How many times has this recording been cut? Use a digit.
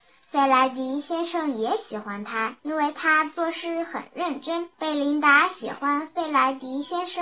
2